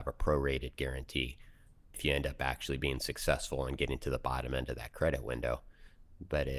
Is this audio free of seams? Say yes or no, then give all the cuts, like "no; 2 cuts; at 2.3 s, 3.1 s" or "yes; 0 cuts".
yes; 0 cuts